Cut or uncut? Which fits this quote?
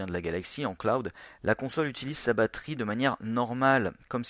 uncut